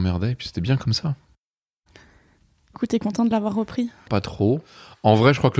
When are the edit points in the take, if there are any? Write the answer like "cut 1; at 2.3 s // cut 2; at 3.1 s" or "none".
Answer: cut 1; at 2.7 s // cut 2; at 4.1 s